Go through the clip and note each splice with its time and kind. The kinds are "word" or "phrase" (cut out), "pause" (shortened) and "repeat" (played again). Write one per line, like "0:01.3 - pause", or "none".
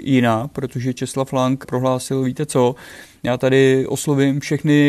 none